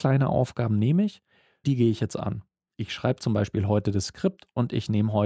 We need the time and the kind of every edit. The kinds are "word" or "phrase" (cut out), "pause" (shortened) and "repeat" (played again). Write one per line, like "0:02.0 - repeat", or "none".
0:01.6 - word